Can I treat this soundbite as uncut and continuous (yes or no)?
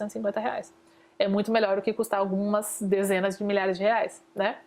yes